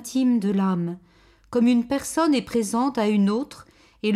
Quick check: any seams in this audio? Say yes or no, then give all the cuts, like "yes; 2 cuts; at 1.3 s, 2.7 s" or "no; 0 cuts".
no; 0 cuts